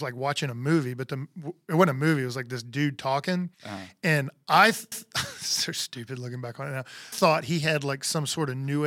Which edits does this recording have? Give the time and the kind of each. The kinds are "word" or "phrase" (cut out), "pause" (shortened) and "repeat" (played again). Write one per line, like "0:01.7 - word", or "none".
0:03.5 - pause
0:04.9 - repeat
0:07.1 - phrase